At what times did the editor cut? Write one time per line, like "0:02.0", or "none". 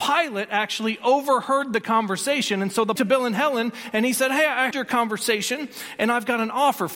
0:03.0
0:04.7